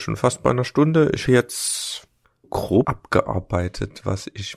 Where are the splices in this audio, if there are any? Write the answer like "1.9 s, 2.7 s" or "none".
1.3 s, 2.4 s, 2.8 s